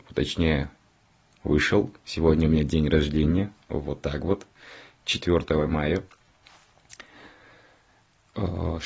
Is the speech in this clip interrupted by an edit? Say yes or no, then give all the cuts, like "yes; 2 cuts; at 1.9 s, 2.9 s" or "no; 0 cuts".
no; 0 cuts